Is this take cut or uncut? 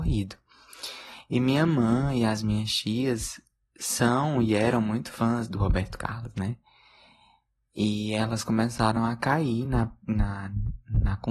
uncut